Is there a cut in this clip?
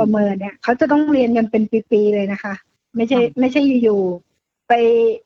no; 0 cuts

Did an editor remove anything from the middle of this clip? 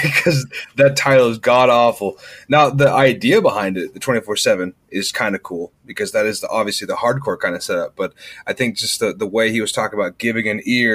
no; 0 cuts

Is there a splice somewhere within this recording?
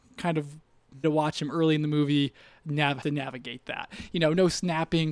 yes; 2 cuts; at 1.0 s, 3.0 s

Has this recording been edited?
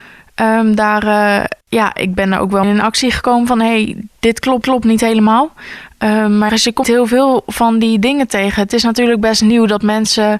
yes; 5 cuts; at 1.6 s, 2.6 s, 4.6 s, 6.5 s, 6.8 s

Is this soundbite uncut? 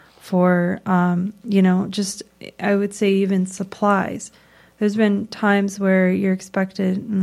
yes; 0 cuts

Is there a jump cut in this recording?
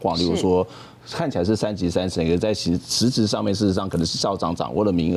no; 0 cuts

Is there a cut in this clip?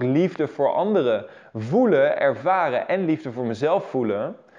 no; 0 cuts

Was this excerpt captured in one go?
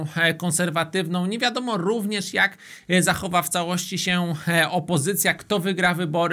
yes; 0 cuts

